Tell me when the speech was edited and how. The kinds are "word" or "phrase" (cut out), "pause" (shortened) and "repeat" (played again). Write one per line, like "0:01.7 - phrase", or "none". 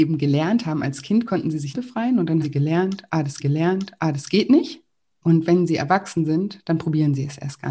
0:01.7 - word
0:02.4 - word
0:03.4 - repeat

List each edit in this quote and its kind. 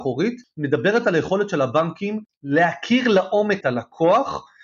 0:03.6 - word

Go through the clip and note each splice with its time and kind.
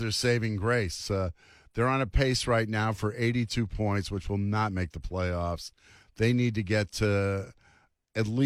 none

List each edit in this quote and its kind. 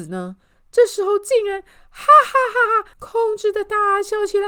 0:02.9 - pause

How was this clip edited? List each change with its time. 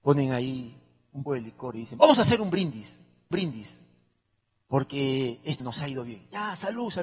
0:01.3 - word
0:03.3 - repeat
0:05.6 - word

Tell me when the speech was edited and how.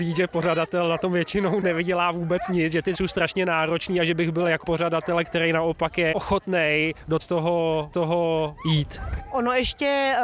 0:01.6 - word
0:02.9 - word
0:04.6 - phrase
0:06.1 - word
0:07.2 - word
0:07.9 - repeat

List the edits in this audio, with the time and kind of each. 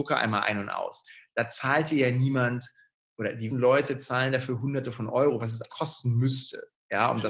0:03.5 - word
0:05.7 - word

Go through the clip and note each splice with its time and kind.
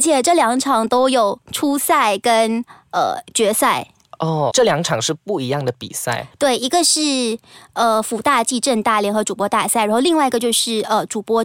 0:04.5 - word

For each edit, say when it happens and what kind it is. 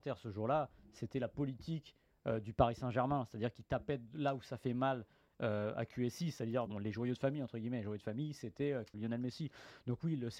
0:06.7 - word
0:08.9 - word

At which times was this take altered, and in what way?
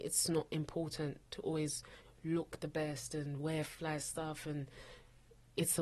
none

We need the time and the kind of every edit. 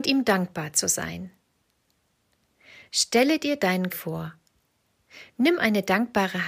0:03.9 - phrase

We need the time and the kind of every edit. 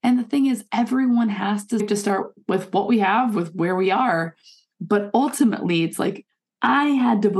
0:01.8 - phrase

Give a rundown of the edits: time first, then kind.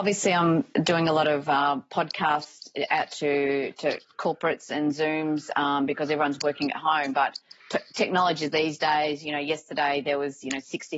0:07.6 - pause

